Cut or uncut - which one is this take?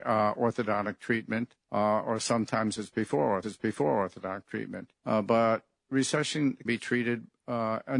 cut